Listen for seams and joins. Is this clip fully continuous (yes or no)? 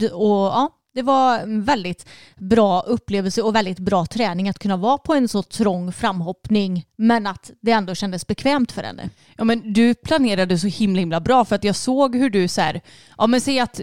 yes